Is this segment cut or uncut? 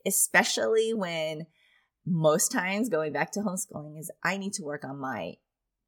uncut